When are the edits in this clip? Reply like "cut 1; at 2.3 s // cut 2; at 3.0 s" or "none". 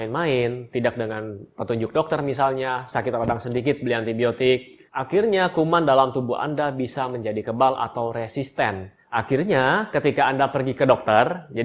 cut 1; at 4.9 s // cut 2; at 9.0 s